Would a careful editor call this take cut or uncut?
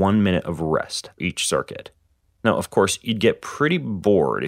cut